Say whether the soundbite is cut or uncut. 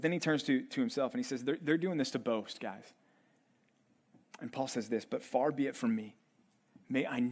uncut